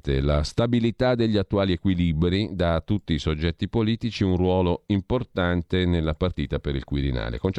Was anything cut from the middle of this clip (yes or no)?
no